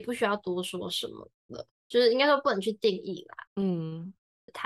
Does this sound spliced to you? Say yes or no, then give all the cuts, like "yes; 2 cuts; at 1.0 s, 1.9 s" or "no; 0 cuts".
yes; 1 cut; at 3.5 s